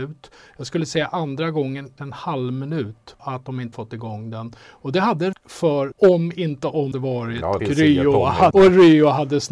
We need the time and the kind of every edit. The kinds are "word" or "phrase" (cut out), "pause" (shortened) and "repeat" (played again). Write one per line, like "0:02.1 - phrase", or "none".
0:02.0 - word
0:03.2 - word
0:03.7 - word
0:05.3 - word
0:05.9 - word
0:06.9 - word
0:07.6 - word
0:08.5 - word